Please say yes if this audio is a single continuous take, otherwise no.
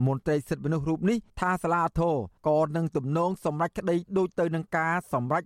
no